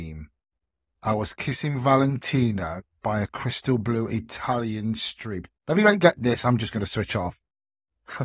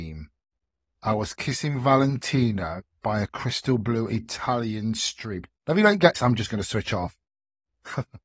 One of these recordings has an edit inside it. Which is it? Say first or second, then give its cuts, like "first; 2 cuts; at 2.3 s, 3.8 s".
second; 1 cut; at 6.1 s